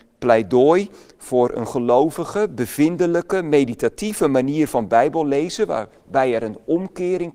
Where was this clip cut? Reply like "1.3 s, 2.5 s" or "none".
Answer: none